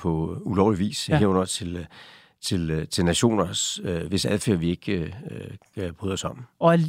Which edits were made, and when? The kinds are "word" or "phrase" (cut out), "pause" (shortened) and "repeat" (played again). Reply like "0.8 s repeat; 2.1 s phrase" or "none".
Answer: none